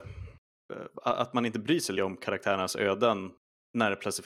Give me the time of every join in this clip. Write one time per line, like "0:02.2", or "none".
0:02.0

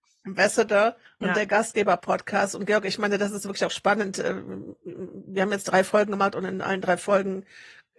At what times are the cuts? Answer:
0:01.0

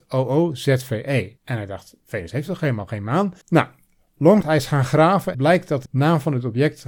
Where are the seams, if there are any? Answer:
0:01.4
0:03.4
0:04.4
0:05.3
0:05.9

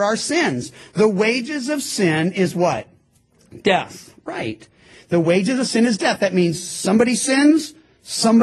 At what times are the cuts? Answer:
none

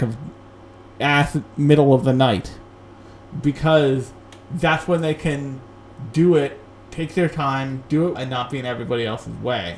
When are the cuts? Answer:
0:01.0
0:08.1

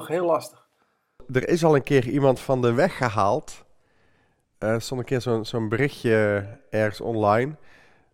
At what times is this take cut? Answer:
none

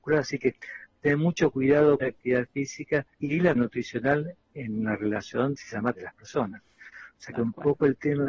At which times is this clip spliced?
0:02.0
0:03.1
0:03.6
0:05.6
0:05.9

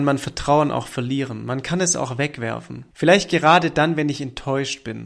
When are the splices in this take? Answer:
0:02.9

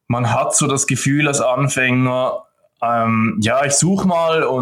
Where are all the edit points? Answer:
none

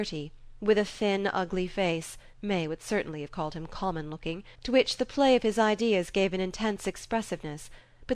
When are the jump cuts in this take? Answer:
0:02.3
0:04.5

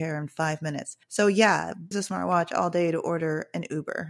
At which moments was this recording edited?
0:01.0
0:01.9

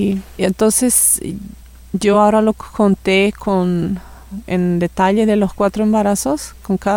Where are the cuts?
none

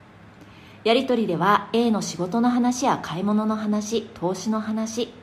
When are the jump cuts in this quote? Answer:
none

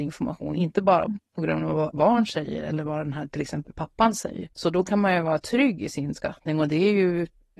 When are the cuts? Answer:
0:01.9
0:04.5

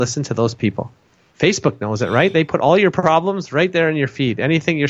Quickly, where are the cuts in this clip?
none

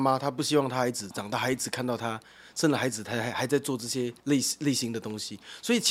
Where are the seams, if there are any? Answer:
0:04.2

